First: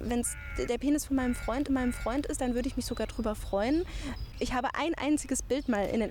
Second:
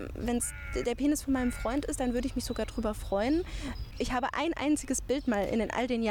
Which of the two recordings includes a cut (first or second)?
first